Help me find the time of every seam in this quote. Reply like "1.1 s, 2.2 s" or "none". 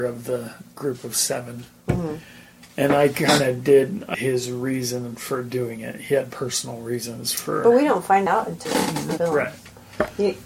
4.1 s, 8.3 s, 8.7 s, 9.2 s